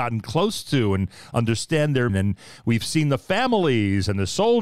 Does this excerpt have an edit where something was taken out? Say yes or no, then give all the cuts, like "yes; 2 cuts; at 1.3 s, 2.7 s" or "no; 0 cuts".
yes; 1 cut; at 2.1 s